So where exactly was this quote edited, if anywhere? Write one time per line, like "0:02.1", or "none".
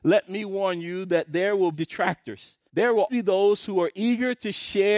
0:01.7
0:02.7
0:03.1